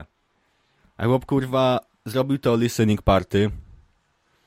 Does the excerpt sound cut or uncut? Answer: uncut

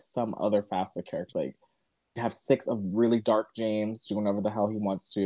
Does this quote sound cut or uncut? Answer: cut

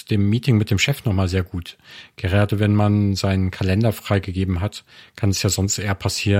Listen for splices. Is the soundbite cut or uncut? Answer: uncut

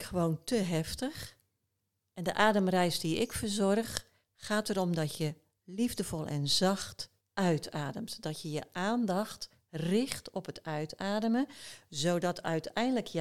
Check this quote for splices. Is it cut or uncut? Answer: uncut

